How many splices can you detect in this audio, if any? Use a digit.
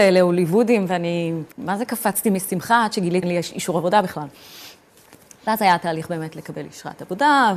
2